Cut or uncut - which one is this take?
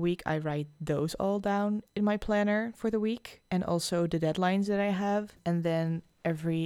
uncut